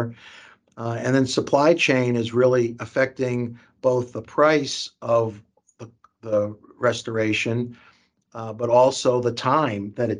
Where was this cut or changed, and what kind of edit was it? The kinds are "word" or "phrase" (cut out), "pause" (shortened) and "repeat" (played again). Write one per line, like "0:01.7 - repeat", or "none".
none